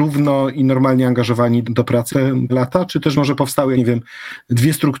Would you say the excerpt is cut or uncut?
cut